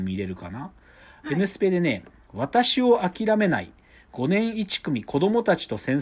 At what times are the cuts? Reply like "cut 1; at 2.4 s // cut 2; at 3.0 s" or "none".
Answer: none